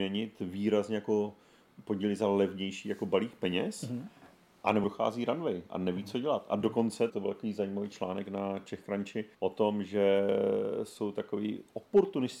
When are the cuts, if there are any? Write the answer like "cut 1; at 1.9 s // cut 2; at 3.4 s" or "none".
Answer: cut 1; at 4.8 s // cut 2; at 7.1 s // cut 3; at 9.3 s

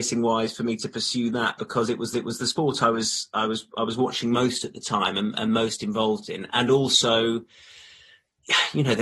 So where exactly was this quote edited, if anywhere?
cut 1; at 2.1 s

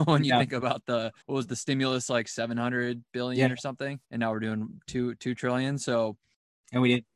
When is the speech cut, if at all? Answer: cut 1; at 1.2 s // cut 2; at 4.0 s

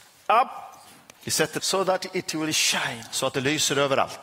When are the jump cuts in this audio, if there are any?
cut 1; at 1.6 s

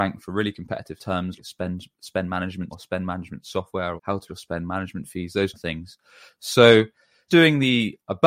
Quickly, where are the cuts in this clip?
cut 1; at 1.0 s // cut 2; at 1.4 s // cut 3; at 2.7 s // cut 4; at 4.0 s // cut 5; at 4.3 s // cut 6; at 5.5 s // cut 7; at 7.3 s

